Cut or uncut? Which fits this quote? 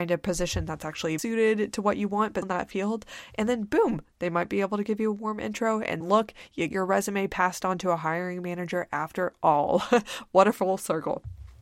cut